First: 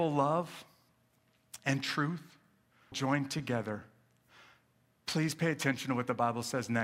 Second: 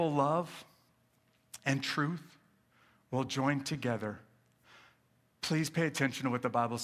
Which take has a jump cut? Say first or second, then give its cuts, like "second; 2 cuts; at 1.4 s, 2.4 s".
first; 1 cut; at 2.9 s